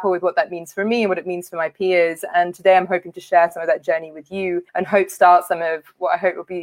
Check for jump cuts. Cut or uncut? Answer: cut